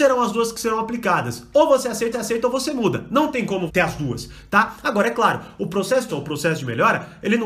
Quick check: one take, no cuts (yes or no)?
no